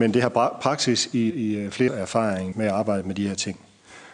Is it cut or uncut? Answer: cut